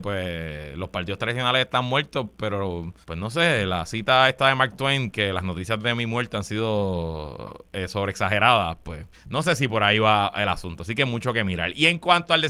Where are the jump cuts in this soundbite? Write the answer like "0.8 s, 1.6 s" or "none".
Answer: 3.0 s, 9.1 s